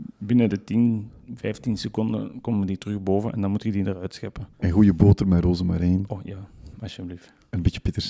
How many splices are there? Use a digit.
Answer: 1